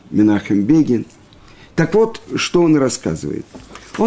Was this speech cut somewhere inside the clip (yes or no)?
no